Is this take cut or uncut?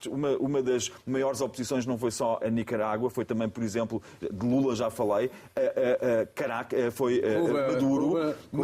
cut